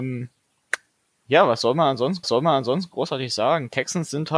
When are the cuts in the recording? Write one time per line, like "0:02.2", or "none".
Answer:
0:02.2